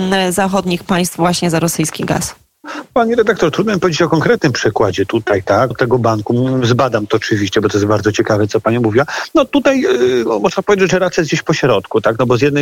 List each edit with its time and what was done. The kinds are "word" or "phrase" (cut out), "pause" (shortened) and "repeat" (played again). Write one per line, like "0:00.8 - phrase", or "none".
0:05.7 - word